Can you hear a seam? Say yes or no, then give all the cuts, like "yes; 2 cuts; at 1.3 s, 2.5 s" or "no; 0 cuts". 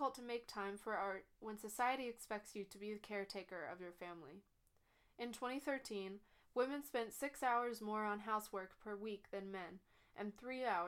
no; 0 cuts